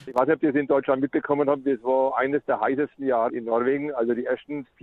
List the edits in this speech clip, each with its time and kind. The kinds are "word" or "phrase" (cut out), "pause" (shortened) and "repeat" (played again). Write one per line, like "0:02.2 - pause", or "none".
0:03.3 - word